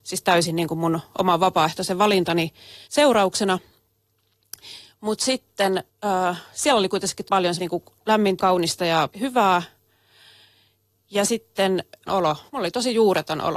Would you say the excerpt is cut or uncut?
cut